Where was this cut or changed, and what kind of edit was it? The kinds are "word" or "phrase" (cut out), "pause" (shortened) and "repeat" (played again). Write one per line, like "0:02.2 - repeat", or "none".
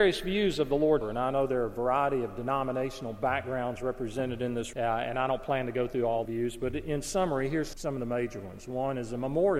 0:01.0 - word
0:04.7 - word
0:06.3 - word
0:07.7 - word